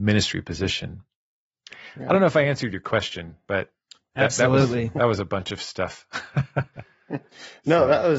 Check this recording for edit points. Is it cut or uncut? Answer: uncut